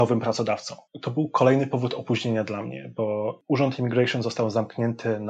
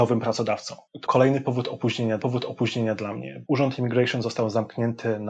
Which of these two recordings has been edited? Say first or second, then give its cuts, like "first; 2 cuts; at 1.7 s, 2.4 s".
second; 3 cuts; at 1.0 s, 2.2 s, 3.4 s